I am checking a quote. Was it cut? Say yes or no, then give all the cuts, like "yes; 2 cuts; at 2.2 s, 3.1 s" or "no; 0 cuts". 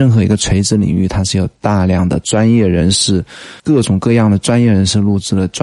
yes; 1 cut; at 3.6 s